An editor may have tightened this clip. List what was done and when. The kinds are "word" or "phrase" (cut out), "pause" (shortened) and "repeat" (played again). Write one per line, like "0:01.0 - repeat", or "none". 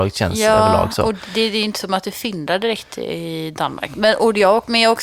none